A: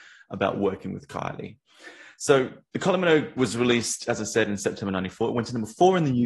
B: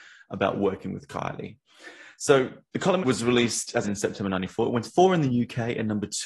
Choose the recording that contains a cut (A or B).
B